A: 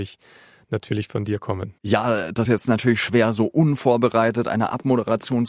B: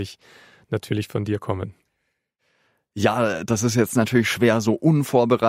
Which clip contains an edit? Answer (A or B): A